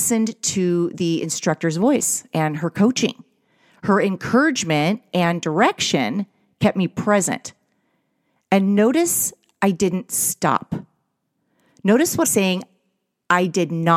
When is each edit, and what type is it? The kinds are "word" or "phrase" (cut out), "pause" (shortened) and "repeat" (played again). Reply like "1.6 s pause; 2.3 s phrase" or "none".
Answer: 12.2 s word

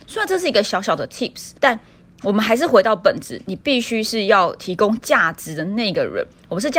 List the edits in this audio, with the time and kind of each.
1.6 s pause

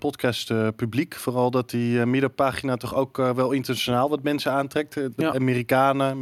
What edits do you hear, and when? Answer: none

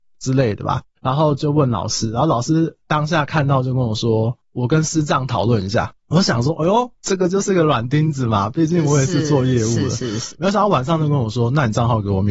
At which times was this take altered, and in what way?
7.0 s pause

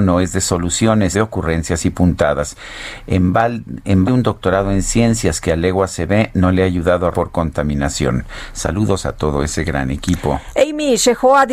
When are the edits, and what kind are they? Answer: 1.1 s word; 4.1 s word; 7.1 s phrase

